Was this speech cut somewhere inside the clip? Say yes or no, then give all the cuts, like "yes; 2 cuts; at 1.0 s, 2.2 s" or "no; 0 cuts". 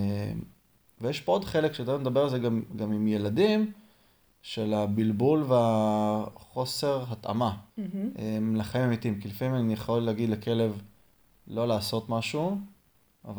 yes; 1 cut; at 7.7 s